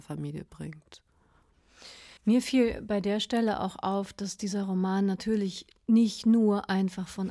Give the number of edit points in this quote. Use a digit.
1